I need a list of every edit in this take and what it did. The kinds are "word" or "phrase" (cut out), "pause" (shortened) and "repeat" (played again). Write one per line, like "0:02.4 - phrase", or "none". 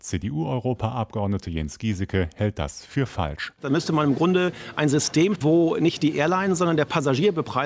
0:05.4 - word